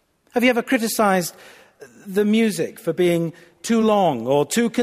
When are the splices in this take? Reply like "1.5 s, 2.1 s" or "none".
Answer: none